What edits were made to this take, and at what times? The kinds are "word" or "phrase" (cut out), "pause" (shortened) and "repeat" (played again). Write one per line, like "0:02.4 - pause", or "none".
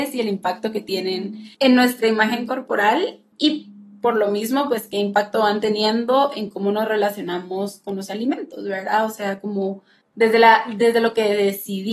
0:01.5 - pause
0:03.3 - pause
0:10.0 - pause